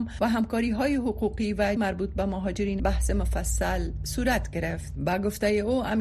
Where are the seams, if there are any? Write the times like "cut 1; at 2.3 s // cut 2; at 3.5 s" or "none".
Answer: cut 1; at 1.8 s // cut 2; at 2.8 s